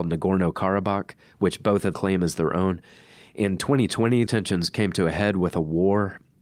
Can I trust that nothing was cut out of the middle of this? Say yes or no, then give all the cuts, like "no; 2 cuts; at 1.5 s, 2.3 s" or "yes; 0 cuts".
no; 2 cuts; at 1.9 s, 4.3 s